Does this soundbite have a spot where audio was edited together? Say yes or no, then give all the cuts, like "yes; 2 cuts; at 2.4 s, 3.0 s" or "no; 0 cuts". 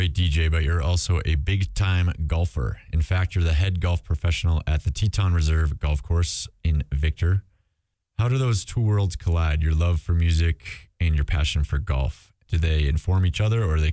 no; 0 cuts